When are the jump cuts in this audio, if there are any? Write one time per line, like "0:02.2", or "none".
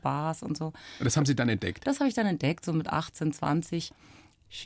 none